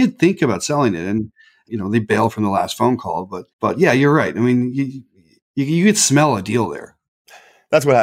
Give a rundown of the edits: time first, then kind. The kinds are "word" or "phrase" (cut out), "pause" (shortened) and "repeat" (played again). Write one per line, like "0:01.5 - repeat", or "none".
0:03.5 - pause